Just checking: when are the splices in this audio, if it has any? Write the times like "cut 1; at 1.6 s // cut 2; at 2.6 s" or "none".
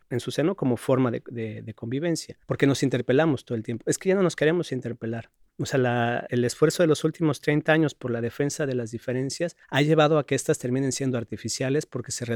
cut 1; at 2.4 s // cut 2; at 6.3 s // cut 3; at 9.6 s